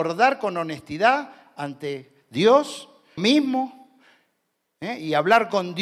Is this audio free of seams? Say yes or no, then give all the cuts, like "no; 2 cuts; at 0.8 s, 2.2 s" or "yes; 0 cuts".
no; 1 cut; at 3.2 s